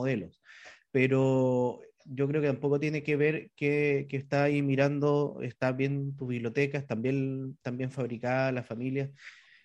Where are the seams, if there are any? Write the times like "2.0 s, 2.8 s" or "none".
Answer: none